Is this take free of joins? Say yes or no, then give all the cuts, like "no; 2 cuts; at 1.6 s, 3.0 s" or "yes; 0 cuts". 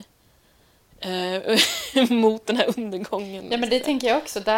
yes; 0 cuts